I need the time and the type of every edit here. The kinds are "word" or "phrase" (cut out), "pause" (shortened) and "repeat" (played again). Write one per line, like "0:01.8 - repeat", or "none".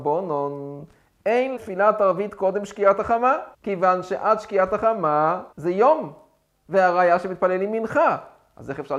0:01.6 - word
0:03.5 - pause
0:05.5 - pause

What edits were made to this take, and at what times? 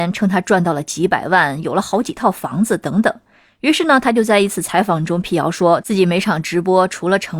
none

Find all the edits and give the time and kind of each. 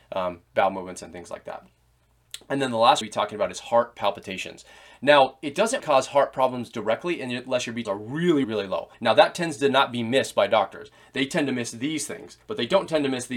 0:03.0 - phrase
0:05.8 - word
0:07.8 - word
0:08.4 - word
0:08.9 - pause
0:12.4 - pause

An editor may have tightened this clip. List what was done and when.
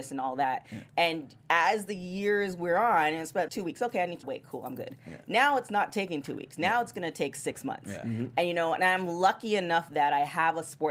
0:01.4 - pause
0:03.5 - word
0:04.2 - word

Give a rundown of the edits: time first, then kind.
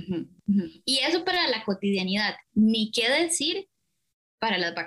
none

